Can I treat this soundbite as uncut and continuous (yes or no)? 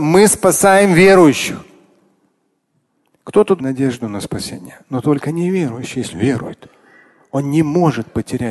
no